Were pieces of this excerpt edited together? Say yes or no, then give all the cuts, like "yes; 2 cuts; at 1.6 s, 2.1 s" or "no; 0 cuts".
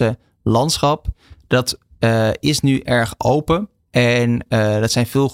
no; 0 cuts